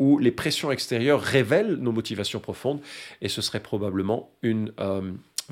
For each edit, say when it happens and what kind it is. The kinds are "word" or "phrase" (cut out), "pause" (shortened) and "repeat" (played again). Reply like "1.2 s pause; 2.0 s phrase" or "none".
none